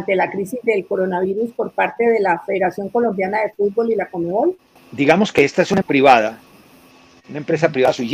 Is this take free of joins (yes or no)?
no